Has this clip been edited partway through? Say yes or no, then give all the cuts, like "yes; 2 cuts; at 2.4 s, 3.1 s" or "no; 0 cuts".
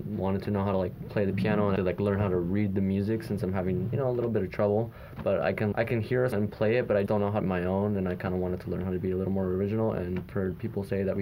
yes; 6 cuts; at 1.8 s, 5.7 s, 6.3 s, 7.1 s, 7.4 s, 10.3 s